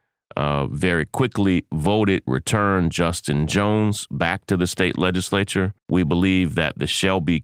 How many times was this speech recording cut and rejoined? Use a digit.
2